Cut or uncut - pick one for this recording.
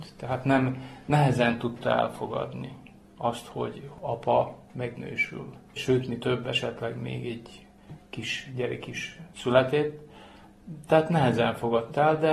cut